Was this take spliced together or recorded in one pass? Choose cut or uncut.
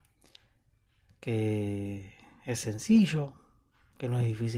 uncut